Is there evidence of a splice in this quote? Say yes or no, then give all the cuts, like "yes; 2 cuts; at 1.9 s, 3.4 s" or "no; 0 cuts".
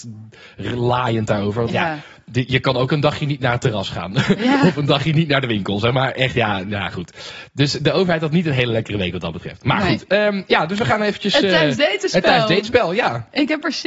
no; 0 cuts